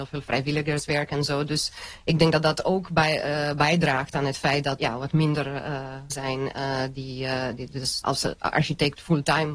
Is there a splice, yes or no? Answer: yes